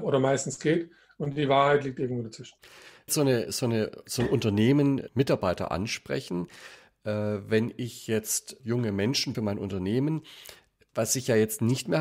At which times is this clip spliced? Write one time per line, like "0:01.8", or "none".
0:03.1
0:05.1
0:08.6
0:09.3